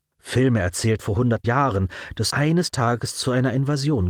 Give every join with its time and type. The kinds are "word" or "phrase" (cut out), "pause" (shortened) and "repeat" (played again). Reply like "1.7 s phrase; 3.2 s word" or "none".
1.0 s word; 1.4 s word; 2.3 s word